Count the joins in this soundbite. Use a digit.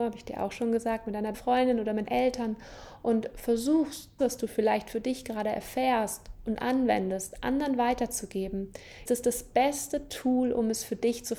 4